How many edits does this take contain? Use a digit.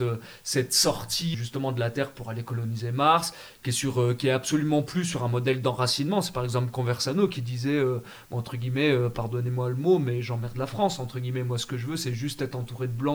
1